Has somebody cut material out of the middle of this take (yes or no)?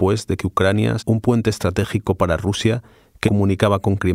yes